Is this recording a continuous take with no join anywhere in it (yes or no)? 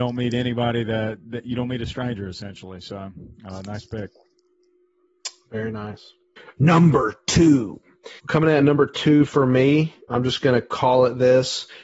no